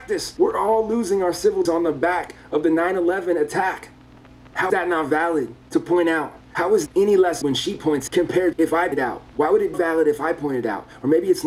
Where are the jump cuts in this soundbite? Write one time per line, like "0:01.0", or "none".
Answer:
0:01.6
0:04.7
0:06.9
0:07.4
0:08.1
0:08.5
0:08.9
0:09.7